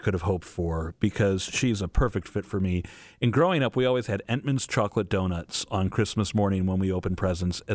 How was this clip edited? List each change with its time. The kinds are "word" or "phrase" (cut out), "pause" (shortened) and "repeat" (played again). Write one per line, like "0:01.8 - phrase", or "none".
none